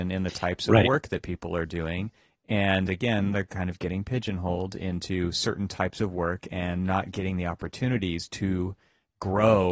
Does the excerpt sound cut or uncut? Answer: uncut